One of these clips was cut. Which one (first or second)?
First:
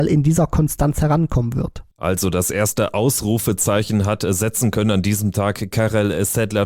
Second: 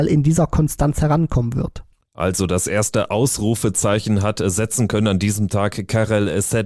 first